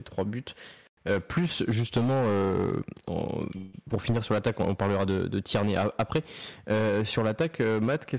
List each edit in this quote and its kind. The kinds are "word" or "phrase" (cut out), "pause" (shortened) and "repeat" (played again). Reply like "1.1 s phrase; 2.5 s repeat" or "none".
none